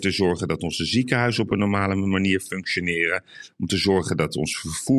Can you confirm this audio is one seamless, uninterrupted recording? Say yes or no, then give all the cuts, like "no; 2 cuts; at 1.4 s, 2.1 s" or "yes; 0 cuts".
yes; 0 cuts